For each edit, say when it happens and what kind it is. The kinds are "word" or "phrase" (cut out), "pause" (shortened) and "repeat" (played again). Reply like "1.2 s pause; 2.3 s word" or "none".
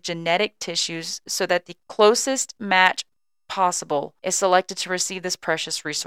4.2 s pause